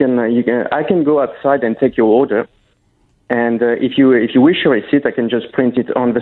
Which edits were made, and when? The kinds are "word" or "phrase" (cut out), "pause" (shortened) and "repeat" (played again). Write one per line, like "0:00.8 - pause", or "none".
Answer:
none